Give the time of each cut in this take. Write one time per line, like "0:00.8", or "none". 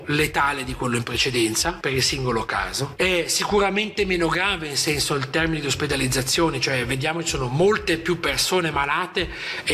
none

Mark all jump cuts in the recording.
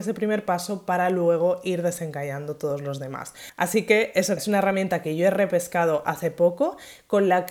0:04.4

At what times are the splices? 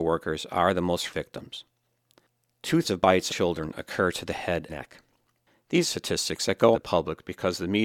0:01.1
0:02.8
0:03.3
0:04.7
0:05.8
0:06.7

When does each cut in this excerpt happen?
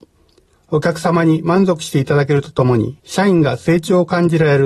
0:03.0

